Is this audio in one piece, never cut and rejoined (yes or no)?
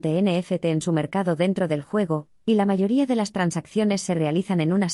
yes